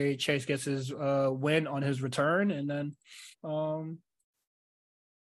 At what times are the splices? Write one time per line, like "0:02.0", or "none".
0:03.3